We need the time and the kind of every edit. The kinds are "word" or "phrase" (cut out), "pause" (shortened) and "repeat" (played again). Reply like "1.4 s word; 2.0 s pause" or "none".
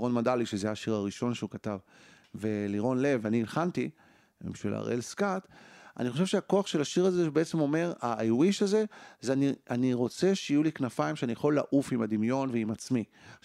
none